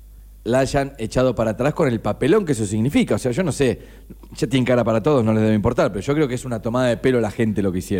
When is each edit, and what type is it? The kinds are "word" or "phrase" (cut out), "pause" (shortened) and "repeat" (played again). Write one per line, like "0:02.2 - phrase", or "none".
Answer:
none